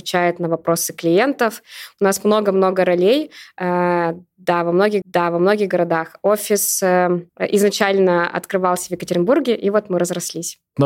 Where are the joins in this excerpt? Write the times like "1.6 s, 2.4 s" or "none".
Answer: 5.0 s, 7.3 s